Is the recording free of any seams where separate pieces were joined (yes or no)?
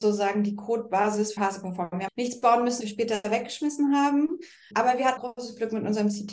no